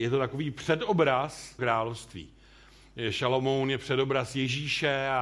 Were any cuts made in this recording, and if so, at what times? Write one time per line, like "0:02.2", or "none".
0:01.6